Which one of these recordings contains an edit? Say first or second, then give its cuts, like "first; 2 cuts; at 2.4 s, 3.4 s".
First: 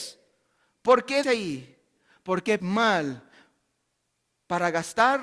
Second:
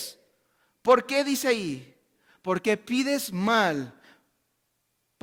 first; 2 cuts; at 1.2 s, 2.6 s